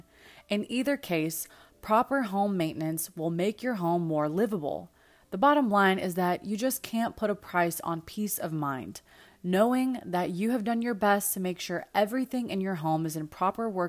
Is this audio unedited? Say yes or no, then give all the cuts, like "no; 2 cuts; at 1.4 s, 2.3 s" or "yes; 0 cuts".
yes; 0 cuts